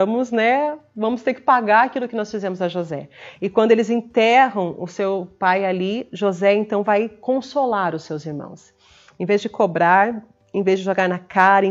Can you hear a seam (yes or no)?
no